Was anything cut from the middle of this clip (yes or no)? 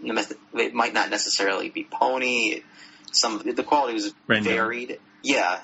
yes